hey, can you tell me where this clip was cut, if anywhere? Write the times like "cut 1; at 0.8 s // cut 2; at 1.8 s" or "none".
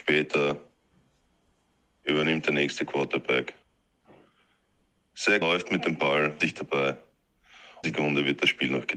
cut 1; at 5.4 s // cut 2; at 6.4 s // cut 3; at 7.8 s